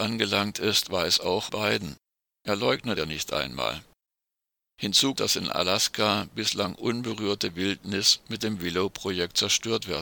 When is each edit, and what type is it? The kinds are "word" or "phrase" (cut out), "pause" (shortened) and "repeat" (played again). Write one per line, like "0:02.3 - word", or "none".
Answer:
0:01.5 - word
0:03.0 - word
0:05.2 - word